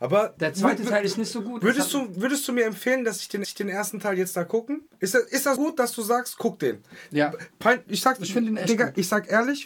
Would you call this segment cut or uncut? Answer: cut